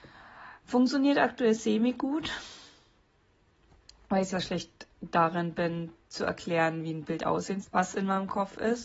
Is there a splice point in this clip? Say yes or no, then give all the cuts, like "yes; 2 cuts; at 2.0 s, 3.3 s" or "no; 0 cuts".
yes; 2 cuts; at 4.3 s, 7.6 s